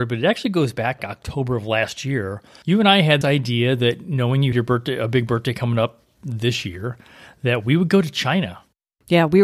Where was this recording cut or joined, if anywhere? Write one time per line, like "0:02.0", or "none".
0:01.0
0:03.2
0:04.5